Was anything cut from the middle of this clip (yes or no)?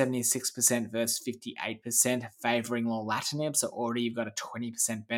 no